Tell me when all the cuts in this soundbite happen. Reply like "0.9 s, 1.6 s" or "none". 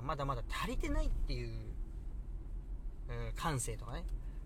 none